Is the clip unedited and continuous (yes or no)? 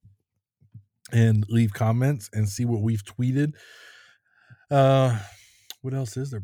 yes